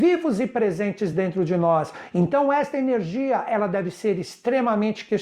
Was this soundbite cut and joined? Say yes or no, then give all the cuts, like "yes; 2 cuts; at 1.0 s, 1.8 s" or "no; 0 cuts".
no; 0 cuts